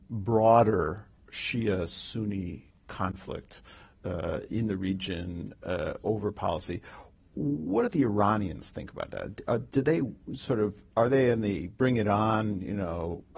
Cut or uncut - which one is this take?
uncut